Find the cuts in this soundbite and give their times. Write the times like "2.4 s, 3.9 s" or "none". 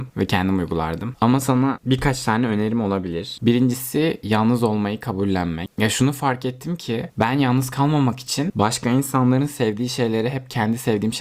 none